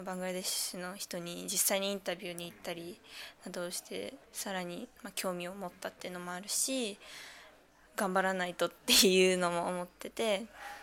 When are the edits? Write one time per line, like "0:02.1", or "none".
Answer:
0:04.2
0:05.0